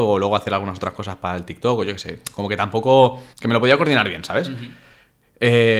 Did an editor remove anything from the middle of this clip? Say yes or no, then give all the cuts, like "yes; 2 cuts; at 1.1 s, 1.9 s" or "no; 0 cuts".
yes; 1 cut; at 3.3 s